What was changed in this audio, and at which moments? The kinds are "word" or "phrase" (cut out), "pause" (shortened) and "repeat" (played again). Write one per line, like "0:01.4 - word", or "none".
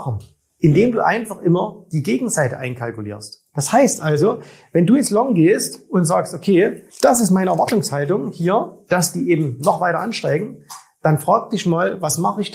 0:06.9 - pause